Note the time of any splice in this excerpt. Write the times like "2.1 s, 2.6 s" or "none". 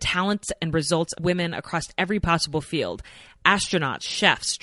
1.2 s